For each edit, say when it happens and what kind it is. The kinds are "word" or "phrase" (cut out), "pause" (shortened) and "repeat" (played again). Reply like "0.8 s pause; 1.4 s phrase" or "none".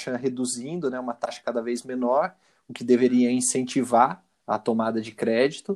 none

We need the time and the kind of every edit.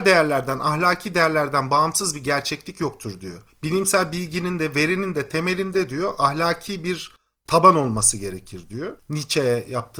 none

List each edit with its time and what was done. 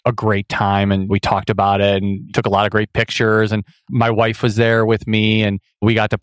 none

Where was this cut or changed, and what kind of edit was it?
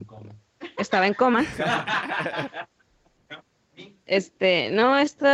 none

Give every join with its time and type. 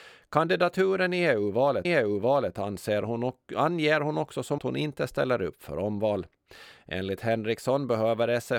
1.8 s repeat; 4.6 s phrase

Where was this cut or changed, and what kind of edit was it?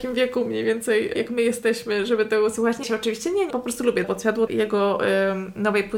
1.2 s word; 2.8 s word; 3.5 s word; 4.0 s word; 4.5 s word

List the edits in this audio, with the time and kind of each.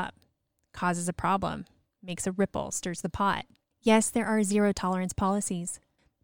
none

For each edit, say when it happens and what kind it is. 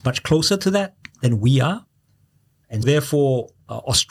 2.8 s word

